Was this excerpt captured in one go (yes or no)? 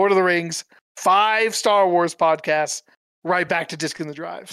yes